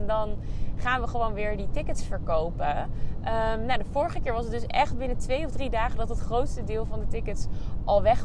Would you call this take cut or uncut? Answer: uncut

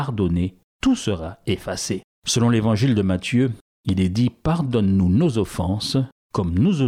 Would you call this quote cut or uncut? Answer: uncut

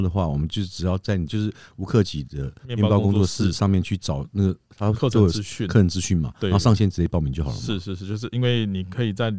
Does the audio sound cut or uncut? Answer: cut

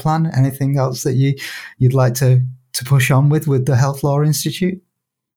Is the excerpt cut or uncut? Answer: uncut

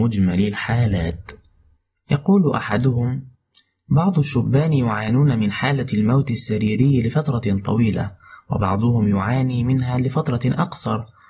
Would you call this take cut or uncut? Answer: uncut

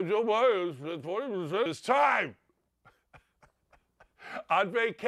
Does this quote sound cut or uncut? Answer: cut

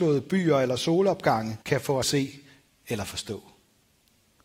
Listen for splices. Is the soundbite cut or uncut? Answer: cut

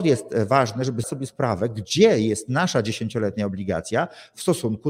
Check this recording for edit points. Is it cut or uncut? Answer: cut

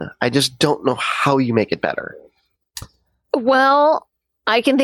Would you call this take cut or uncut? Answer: uncut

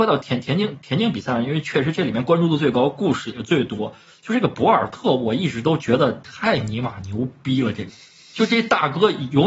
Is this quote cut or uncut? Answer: uncut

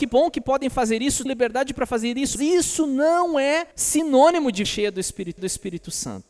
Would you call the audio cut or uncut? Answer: cut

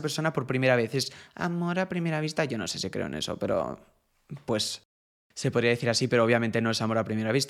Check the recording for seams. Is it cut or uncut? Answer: uncut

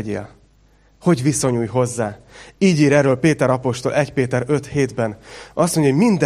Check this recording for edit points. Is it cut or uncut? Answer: uncut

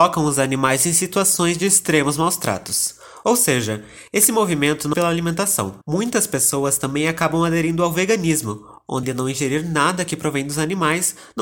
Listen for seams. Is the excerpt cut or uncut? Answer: cut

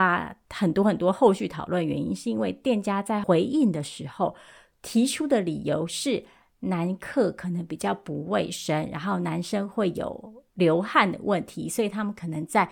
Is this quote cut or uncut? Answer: uncut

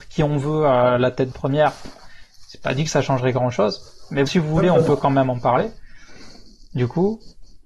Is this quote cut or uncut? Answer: cut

